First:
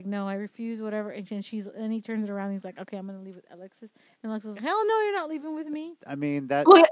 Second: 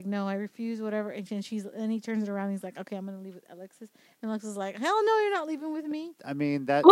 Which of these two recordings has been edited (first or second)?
first